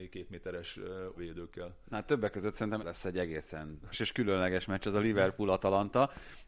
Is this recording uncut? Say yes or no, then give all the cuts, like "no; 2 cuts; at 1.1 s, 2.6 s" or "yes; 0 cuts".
no; 3 cuts; at 1.2 s, 2.8 s, 3.9 s